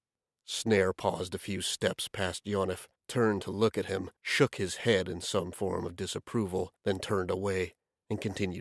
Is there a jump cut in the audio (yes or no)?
yes